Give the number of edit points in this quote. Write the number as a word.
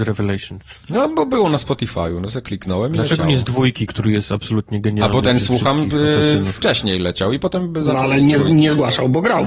one